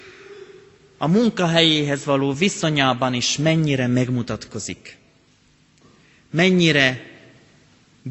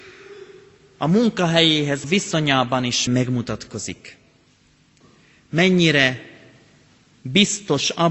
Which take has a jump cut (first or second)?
second